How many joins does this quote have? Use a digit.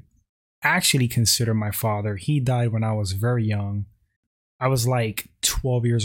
0